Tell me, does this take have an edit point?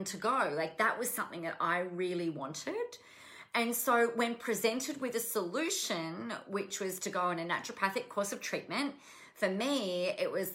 no; 0 cuts

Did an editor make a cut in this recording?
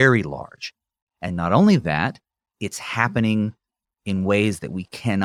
no; 0 cuts

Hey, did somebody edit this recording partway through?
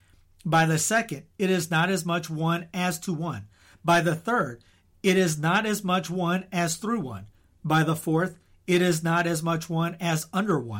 no; 0 cuts

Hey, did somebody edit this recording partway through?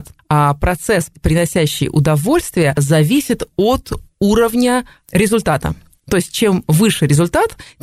no; 0 cuts

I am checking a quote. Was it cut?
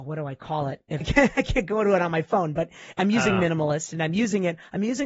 yes; 1 cut; at 1.0 s

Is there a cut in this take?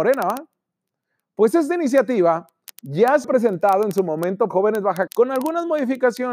yes; 3 cuts; at 3.2 s, 4.5 s, 5.1 s

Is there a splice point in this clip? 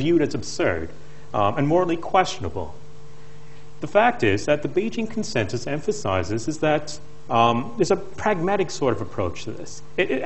no; 0 cuts

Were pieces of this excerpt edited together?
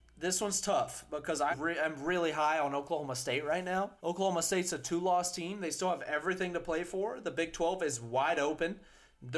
yes; 2 cuts; at 1.5 s, 4.0 s

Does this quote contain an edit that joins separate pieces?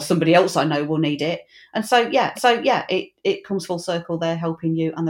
yes; 1 cut; at 2.3 s

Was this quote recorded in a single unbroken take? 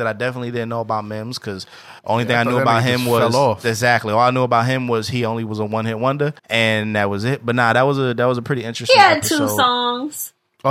no; 2 cuts; at 2.0 s, 6.4 s

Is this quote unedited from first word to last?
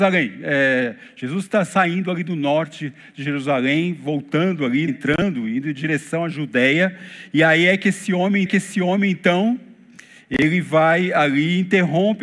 no; 2 cuts; at 4.9 s, 8.5 s

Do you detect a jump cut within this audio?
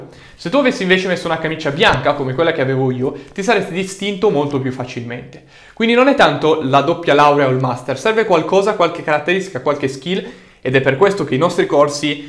no; 0 cuts

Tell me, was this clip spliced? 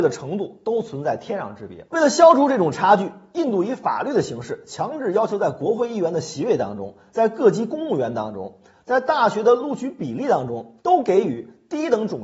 yes; 2 cuts; at 1.9 s, 10.8 s

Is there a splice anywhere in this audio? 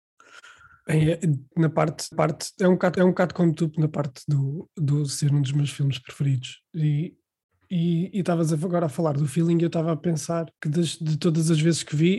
yes; 4 cuts; at 1.5 s, 2.1 s, 3.0 s, 10.5 s

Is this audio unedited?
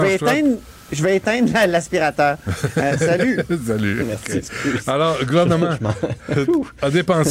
yes; 0 cuts

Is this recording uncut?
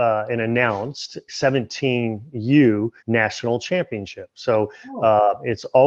no; 2 cuts; at 1.3 s, 3.0 s

